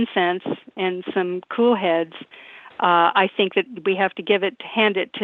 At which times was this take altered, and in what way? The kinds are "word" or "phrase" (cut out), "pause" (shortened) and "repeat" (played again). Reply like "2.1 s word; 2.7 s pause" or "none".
none